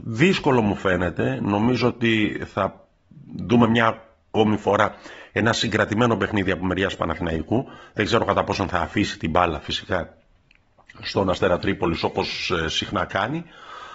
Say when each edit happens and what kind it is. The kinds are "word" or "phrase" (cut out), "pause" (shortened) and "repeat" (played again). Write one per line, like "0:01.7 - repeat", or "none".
none